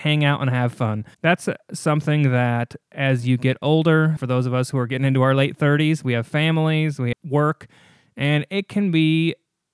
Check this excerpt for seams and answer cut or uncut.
cut